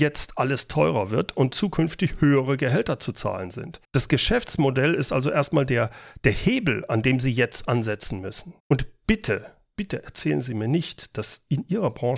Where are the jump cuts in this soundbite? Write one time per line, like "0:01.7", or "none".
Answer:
0:03.8
0:08.6